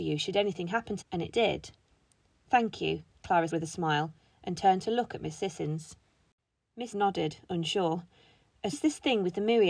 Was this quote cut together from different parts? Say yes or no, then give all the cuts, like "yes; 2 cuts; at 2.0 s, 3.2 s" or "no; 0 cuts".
yes; 4 cuts; at 1.0 s, 3.5 s, 6.9 s, 8.7 s